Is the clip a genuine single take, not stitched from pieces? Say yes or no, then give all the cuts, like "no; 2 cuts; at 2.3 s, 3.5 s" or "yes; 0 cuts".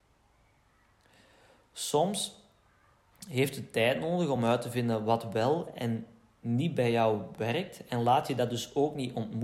yes; 0 cuts